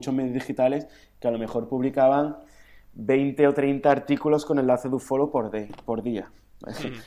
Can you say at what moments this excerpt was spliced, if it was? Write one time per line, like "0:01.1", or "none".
none

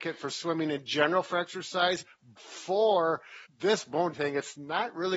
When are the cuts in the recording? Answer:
0:02.4
0:03.4
0:04.1

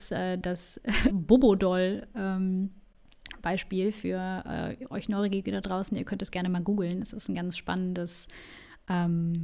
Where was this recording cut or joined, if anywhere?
0:01.1

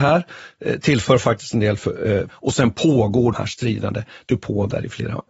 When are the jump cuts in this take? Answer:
0:02.3
0:03.3
0:04.3

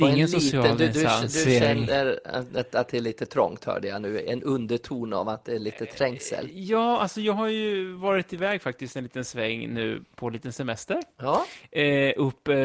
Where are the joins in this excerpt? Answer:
none

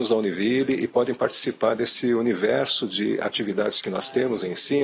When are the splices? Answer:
none

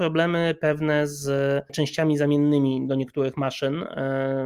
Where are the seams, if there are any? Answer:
none

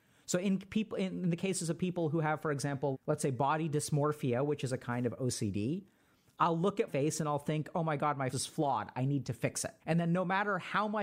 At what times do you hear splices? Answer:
0:02.9
0:06.9
0:08.3
0:09.8

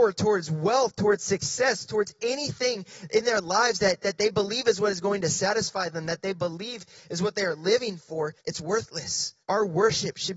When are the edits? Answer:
0:08.4
0:09.4

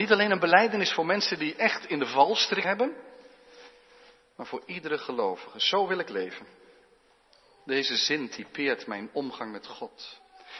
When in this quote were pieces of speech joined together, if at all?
0:02.6

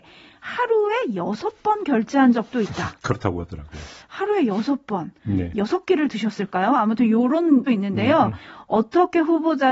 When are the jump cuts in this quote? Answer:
0:07.7

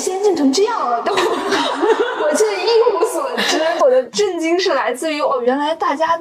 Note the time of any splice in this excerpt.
none

